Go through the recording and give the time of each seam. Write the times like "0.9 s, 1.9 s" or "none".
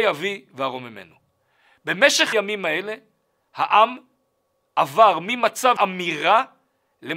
2.3 s, 5.8 s